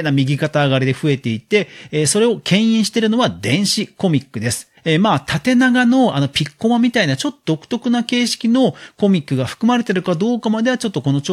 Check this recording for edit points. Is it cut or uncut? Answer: cut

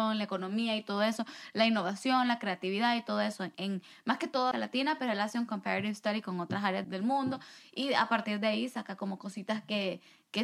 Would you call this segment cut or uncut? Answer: cut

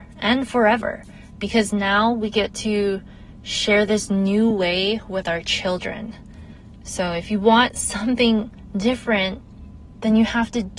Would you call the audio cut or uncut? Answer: uncut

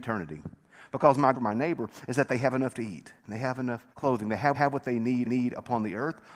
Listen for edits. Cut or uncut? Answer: cut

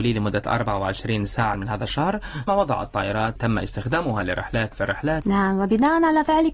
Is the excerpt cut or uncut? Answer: cut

